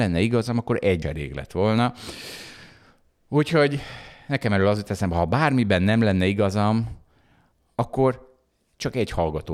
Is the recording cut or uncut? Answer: cut